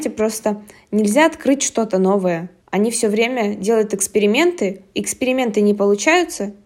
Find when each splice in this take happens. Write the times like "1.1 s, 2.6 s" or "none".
none